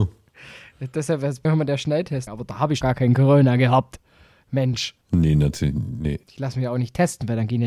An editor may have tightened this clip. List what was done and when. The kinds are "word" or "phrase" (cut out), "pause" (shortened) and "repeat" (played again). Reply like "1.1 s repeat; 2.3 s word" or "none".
1.4 s word; 2.3 s word; 2.8 s word; 5.0 s pause; 6.2 s pause

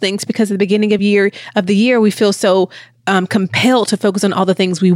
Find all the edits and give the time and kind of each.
none

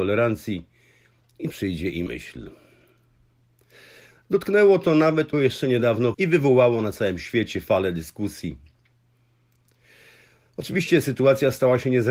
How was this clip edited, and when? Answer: 1.5 s phrase; 2.1 s word; 5.3 s word; 6.1 s phrase

